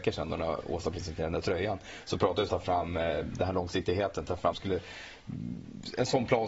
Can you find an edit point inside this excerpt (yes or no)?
yes